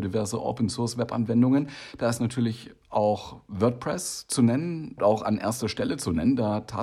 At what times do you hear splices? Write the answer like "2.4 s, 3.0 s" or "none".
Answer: 5.0 s